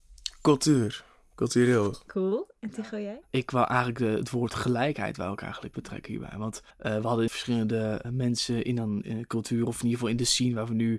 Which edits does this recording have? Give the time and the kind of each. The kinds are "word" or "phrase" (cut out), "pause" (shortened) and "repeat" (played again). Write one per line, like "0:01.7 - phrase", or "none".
0:05.7 - word
0:06.7 - pause
0:07.3 - word
0:08.0 - word